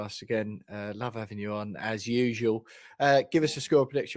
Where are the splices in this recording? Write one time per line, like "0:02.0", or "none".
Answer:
none